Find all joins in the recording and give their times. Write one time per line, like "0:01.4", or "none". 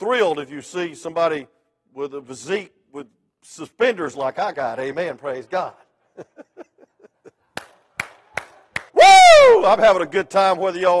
0:08.9

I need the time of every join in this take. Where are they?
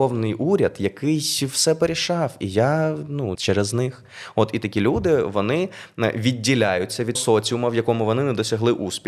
0:03.3
0:07.2

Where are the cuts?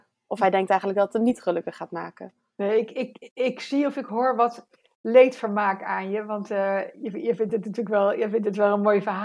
none

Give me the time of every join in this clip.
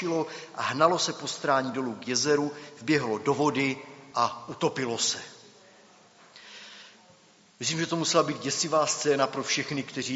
none

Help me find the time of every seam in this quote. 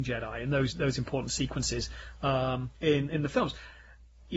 0:02.7

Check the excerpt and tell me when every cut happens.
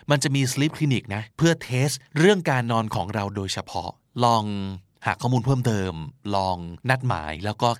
0:01.3
0:06.8

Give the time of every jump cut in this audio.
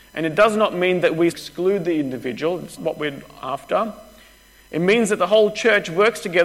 0:01.3
0:02.8

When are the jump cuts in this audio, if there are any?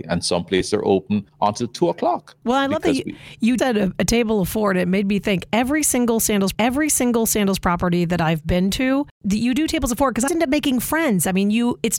0:01.3
0:03.6
0:06.5
0:10.3

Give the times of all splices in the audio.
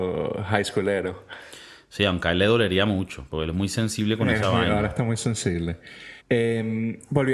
0:06.2

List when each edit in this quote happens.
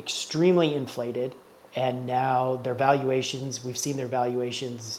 0:01.6

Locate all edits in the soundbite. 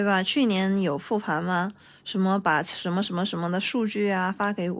none

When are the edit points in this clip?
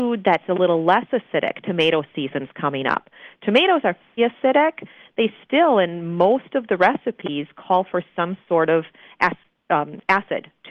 0:04.2

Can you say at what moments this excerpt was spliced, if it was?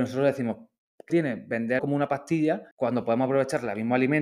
0:01.1
0:01.8
0:02.7

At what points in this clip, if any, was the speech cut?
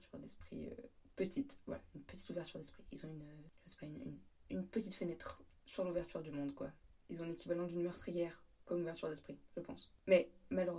none

